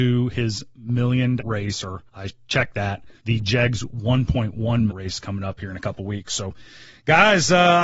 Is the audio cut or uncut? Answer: cut